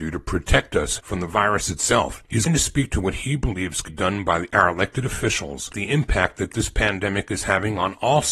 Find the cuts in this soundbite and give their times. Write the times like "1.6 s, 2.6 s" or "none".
2.5 s, 3.9 s, 5.7 s